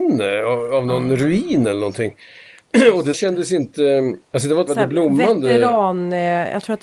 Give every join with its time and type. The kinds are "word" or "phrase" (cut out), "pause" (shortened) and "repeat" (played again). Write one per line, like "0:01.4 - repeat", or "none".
0:03.1 - word
0:04.3 - pause
0:04.7 - word